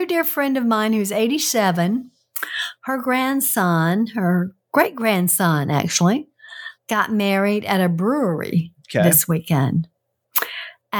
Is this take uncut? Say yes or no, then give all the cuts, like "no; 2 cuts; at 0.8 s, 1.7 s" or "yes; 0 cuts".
yes; 0 cuts